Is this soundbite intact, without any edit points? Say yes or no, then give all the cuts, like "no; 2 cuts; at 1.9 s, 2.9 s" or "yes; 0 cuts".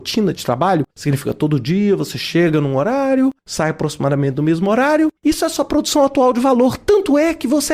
no; 3 cuts; at 0.9 s, 3.4 s, 5.2 s